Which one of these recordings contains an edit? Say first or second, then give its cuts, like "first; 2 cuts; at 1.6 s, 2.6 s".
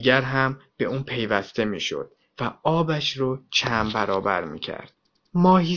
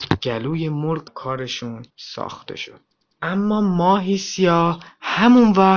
second; 2 cuts; at 1.1 s, 1.9 s